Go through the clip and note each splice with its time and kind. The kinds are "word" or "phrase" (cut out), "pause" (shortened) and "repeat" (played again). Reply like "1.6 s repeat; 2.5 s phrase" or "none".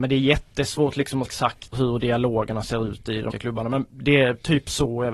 1.3 s word; 1.7 s word; 3.3 s word